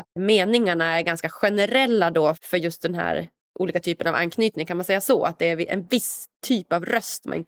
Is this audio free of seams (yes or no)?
no